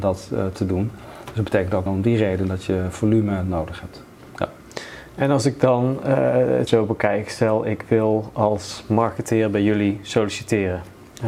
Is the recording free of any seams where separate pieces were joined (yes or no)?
no